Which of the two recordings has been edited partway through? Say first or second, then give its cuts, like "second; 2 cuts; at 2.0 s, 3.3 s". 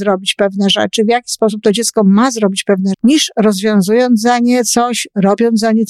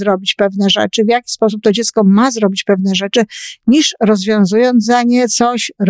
first; 1 cut; at 2.9 s